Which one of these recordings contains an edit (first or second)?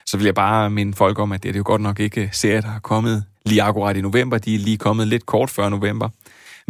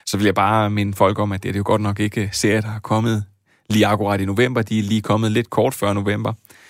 first